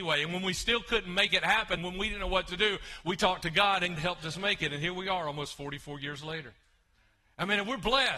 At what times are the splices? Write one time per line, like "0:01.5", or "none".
0:01.8
0:04.0